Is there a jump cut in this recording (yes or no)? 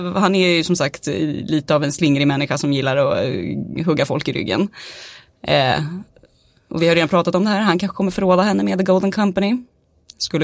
no